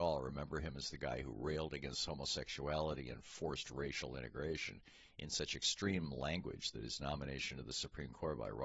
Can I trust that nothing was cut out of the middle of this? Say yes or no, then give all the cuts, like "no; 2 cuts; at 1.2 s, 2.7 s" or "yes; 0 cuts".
yes; 0 cuts